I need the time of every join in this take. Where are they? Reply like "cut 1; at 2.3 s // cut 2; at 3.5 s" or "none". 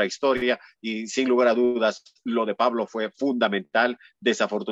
none